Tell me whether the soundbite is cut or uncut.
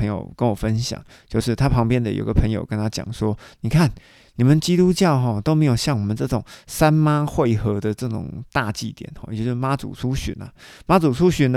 uncut